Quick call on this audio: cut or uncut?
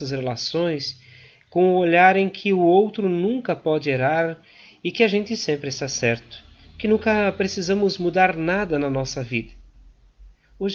uncut